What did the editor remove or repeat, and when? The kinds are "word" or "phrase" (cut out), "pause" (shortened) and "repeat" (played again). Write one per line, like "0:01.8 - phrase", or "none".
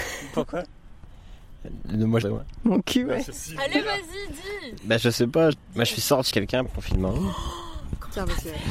0:02.2 - phrase
0:03.3 - word
0:05.5 - word
0:06.3 - word
0:06.6 - word